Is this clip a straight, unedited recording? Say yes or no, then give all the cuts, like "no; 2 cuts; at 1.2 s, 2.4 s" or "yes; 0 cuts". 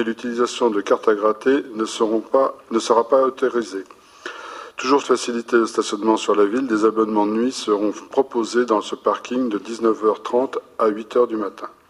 no; 1 cut; at 5.0 s